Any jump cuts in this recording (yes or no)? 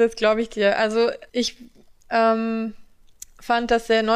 yes